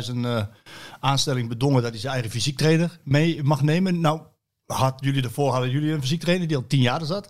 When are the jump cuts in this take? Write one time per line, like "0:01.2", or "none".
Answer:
none